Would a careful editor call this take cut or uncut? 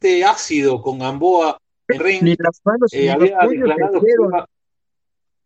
cut